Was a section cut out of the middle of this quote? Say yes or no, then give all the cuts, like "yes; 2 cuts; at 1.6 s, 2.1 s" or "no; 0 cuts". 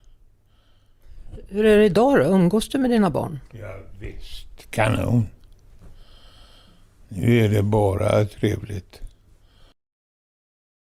no; 0 cuts